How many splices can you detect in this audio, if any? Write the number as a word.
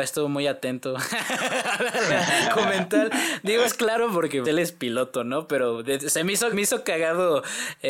four